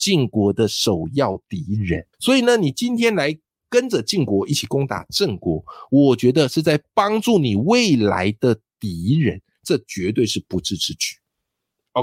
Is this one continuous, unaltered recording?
no; 1 cut; at 2.1 s

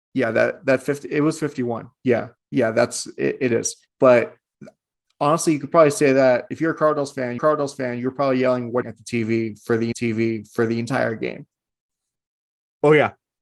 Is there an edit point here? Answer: yes; 5 cuts; at 2.4 s, 3.9 s, 7.4 s, 8.8 s, 9.9 s

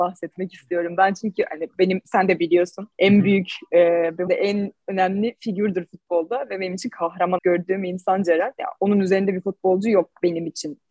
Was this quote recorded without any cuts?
no; 3 cuts; at 2.9 s, 4.3 s, 7.4 s

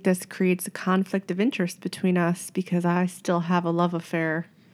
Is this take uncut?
yes; 0 cuts

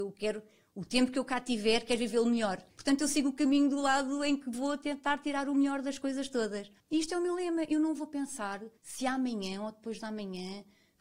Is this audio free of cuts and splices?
no; 3 cuts; at 2.7 s, 6.8 s, 8.8 s

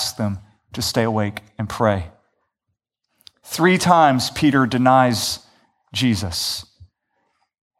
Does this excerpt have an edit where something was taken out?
no; 0 cuts

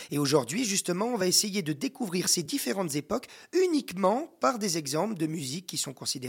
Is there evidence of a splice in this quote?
no; 0 cuts

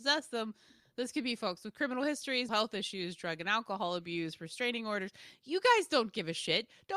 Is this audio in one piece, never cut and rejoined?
no; 1 cut; at 2.5 s

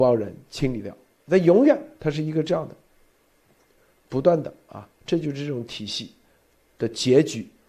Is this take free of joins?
yes; 0 cuts

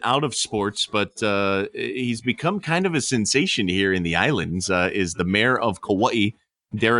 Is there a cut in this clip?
no; 0 cuts

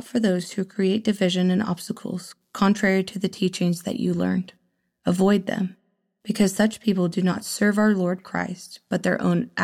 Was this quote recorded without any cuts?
yes; 0 cuts

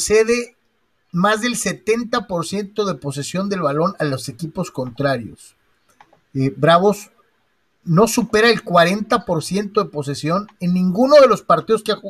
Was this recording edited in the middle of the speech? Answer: no; 0 cuts

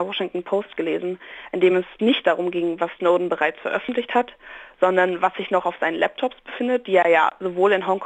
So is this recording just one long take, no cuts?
yes; 0 cuts

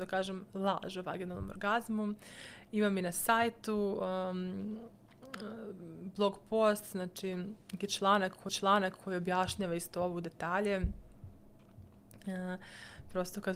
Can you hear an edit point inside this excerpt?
yes; 1 cut; at 8.5 s

